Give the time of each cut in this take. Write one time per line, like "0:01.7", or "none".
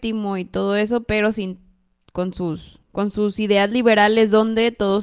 0:02.8

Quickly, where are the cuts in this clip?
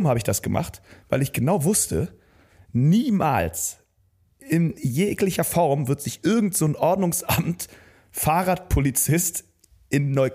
none

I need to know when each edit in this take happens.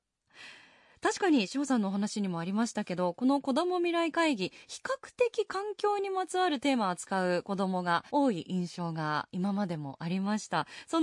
0:08.1

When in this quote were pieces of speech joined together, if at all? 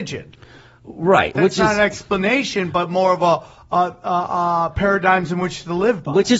none

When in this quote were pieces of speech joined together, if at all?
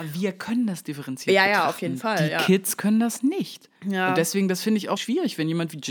0:03.8
0:05.0

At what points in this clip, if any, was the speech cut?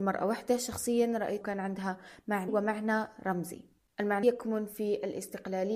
0:01.4
0:02.5
0:04.2

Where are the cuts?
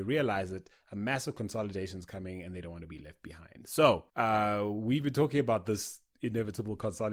0:04.1

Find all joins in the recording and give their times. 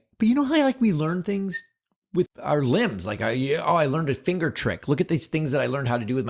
0:02.3

